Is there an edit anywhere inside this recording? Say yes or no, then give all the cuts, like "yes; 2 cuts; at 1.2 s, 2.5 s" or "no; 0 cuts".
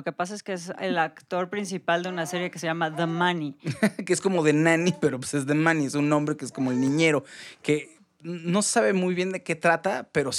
no; 0 cuts